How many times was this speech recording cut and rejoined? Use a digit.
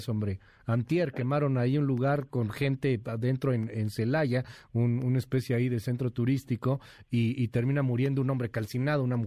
0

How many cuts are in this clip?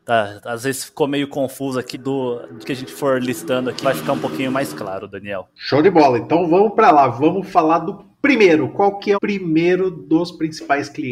4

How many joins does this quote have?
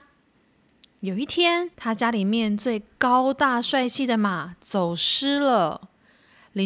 1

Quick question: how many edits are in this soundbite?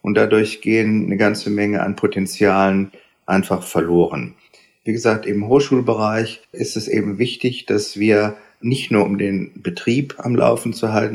1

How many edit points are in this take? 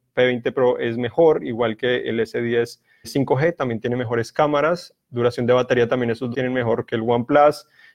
2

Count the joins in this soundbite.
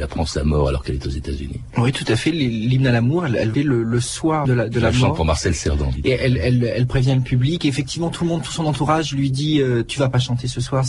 2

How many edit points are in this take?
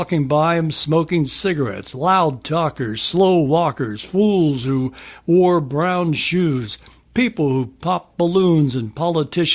0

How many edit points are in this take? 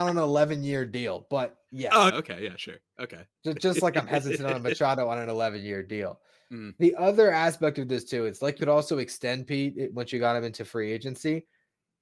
2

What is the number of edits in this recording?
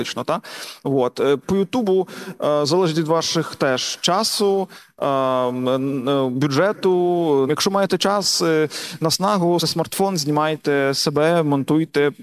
3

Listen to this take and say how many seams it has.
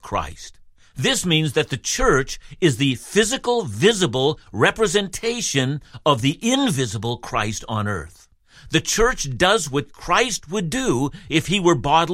0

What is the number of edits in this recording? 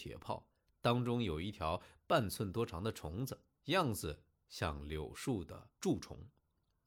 2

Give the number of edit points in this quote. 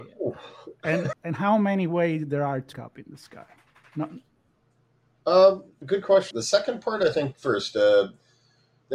4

